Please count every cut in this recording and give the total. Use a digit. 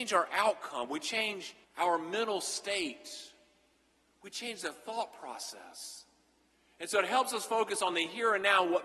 1